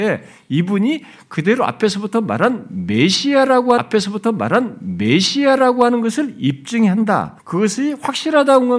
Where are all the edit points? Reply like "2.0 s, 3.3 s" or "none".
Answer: 3.8 s, 7.4 s